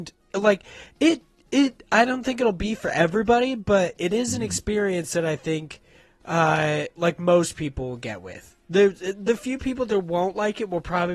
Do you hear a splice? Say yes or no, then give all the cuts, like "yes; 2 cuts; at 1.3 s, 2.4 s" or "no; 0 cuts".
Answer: no; 0 cuts